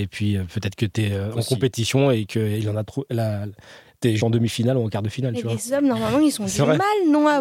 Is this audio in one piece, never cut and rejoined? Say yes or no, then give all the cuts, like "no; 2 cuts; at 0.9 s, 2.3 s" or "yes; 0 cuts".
no; 1 cut; at 4.2 s